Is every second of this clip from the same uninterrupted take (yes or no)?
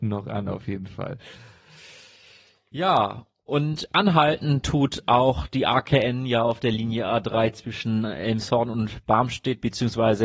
yes